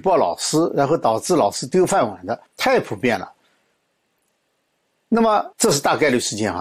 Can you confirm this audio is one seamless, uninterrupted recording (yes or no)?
no